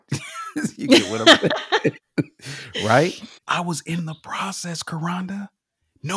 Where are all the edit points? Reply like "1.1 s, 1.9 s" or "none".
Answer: 3.4 s